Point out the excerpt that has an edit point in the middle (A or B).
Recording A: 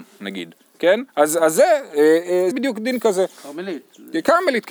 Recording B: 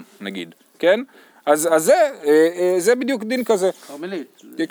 A